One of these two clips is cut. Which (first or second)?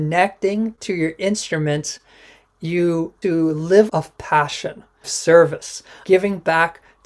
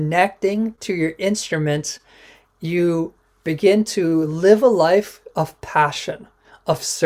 first